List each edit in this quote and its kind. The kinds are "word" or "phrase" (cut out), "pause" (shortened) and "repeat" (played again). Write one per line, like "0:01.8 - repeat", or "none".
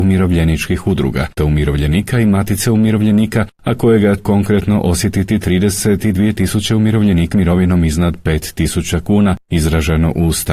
0:01.4 - word
0:04.2 - word
0:07.3 - word